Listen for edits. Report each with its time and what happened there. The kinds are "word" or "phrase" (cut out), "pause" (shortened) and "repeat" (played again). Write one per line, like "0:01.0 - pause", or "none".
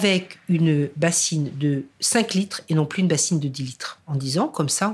none